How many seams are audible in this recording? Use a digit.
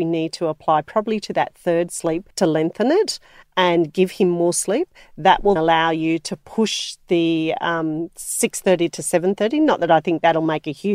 2